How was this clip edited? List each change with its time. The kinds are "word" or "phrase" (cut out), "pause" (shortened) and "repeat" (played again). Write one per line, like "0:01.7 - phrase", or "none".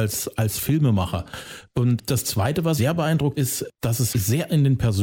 0:02.0 - word
0:02.8 - word
0:03.3 - word
0:04.1 - word